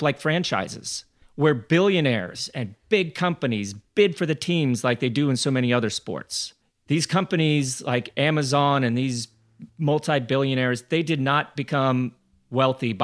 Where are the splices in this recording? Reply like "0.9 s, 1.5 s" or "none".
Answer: none